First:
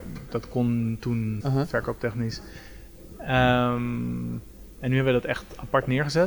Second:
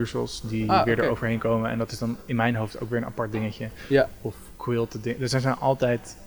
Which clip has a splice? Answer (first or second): first